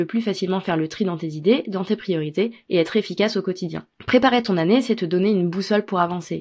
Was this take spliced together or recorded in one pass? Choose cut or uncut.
uncut